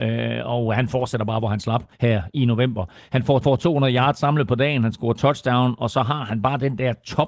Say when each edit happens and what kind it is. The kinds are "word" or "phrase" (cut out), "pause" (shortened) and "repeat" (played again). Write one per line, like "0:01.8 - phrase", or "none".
0:01.9 - pause
0:03.4 - repeat